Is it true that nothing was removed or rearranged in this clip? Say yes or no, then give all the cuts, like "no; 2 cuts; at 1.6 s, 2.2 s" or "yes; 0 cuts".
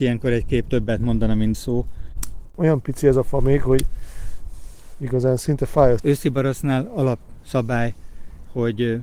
no; 2 cuts; at 1.5 s, 6.0 s